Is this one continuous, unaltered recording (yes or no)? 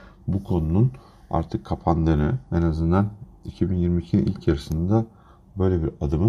yes